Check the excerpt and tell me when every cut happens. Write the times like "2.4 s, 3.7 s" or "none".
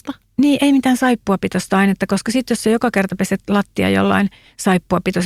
none

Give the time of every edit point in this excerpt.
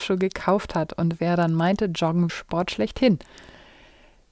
2.3 s

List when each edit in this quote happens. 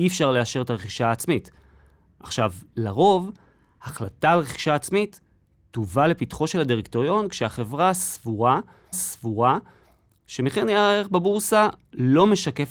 8.9 s

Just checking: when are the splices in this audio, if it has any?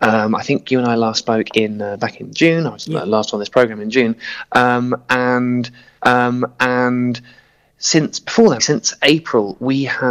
6.0 s, 8.6 s

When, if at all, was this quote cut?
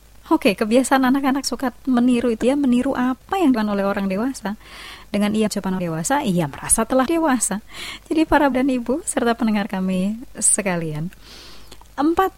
1.4 s, 2.4 s, 3.5 s, 5.5 s, 5.8 s, 7.1 s, 8.5 s

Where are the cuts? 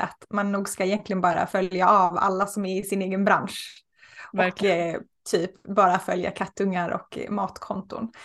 none

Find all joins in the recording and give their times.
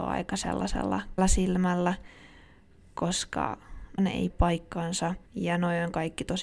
1.2 s, 4.0 s, 4.3 s, 5.3 s

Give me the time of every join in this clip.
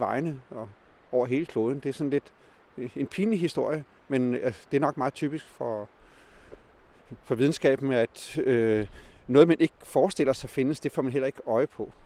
none

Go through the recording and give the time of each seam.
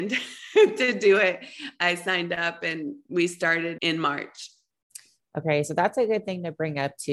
3.8 s

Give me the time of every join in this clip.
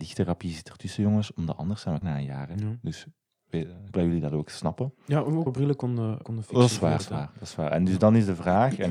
2.0 s, 3.9 s, 5.5 s, 6.2 s, 7.0 s

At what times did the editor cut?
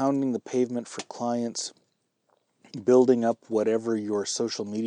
none

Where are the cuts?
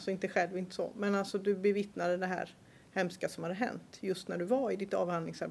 none

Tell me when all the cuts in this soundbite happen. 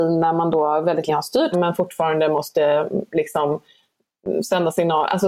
1.1 s, 1.5 s

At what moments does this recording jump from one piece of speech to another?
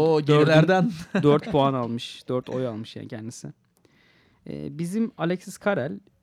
none

